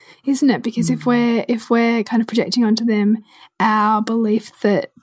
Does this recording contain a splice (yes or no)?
no